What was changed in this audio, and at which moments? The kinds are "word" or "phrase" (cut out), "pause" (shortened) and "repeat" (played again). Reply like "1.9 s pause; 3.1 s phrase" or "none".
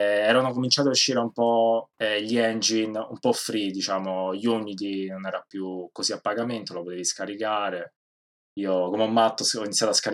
1.9 s pause